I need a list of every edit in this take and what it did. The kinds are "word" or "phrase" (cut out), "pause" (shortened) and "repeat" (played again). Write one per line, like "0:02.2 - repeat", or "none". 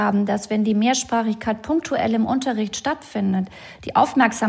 none